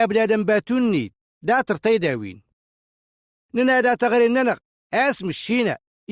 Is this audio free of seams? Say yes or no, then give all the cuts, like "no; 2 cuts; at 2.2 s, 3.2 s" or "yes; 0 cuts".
yes; 0 cuts